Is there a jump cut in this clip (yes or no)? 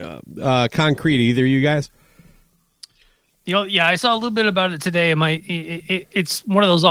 no